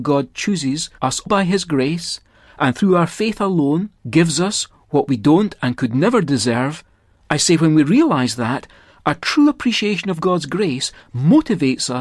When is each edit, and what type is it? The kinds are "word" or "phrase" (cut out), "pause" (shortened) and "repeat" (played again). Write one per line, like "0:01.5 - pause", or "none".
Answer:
0:01.3 - word